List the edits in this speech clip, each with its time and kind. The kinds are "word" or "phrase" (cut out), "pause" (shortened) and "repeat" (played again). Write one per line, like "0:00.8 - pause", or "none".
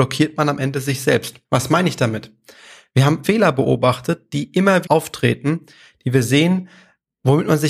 0:01.4 - pause
0:03.2 - word
0:04.8 - word